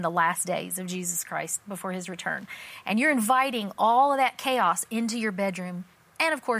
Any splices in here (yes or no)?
no